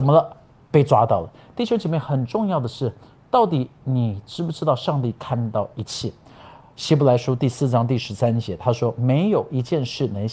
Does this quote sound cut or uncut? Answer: uncut